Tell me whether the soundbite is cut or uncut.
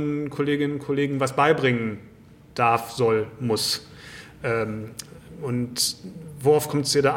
uncut